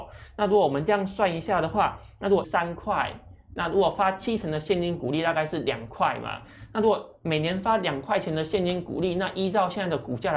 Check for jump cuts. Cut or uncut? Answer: cut